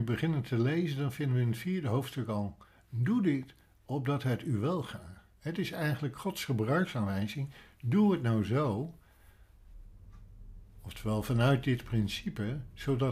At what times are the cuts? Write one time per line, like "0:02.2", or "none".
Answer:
none